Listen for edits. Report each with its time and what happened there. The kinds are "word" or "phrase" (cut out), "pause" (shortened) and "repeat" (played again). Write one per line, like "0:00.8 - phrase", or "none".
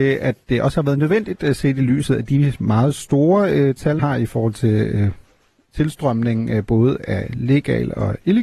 0:04.0 - word